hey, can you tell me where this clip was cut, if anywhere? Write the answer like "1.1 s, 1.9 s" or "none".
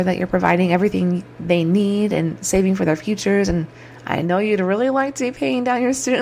none